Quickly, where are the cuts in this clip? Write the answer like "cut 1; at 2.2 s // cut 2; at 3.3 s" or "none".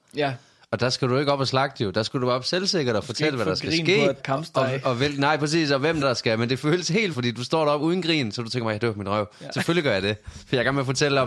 cut 1; at 4.2 s // cut 2; at 6.0 s // cut 3; at 7.1 s

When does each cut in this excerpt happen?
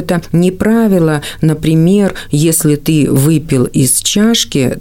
none

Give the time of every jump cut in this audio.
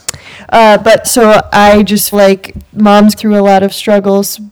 cut 1; at 1.0 s // cut 2; at 2.1 s // cut 3; at 3.2 s

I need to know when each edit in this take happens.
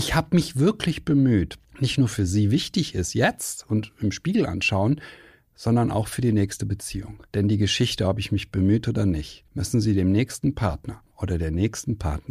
cut 1; at 1.6 s // cut 2; at 7.3 s // cut 3; at 9.5 s // cut 4; at 11.1 s

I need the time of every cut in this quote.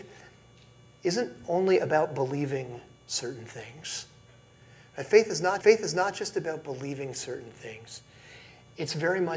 cut 1; at 5.6 s

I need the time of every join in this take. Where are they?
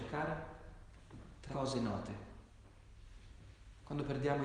cut 1; at 1.5 s

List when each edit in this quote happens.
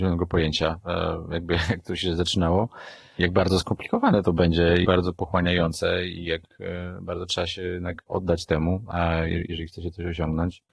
cut 1; at 4.8 s

